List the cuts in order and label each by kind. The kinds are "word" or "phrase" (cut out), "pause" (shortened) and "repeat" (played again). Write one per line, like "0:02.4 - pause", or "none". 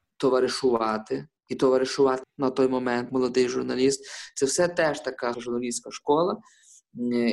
0:01.4 - pause
0:02.2 - word
0:03.1 - word
0:05.3 - word